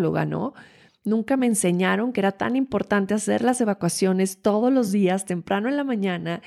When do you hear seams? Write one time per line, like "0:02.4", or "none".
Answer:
none